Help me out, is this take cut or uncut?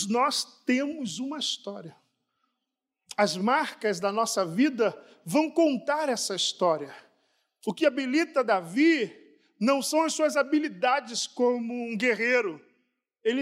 uncut